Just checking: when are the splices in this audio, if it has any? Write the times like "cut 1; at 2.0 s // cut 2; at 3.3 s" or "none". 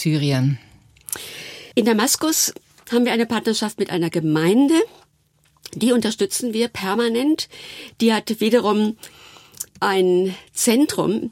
cut 1; at 1.7 s // cut 2; at 2.6 s // cut 3; at 9.7 s